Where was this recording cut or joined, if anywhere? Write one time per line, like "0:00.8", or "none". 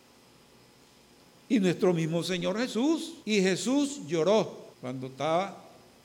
0:03.2
0:04.7